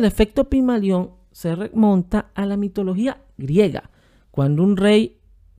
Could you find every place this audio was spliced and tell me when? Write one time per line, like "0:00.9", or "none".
none